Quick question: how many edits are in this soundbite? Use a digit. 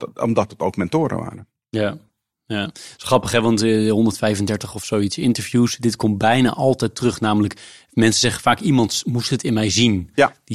0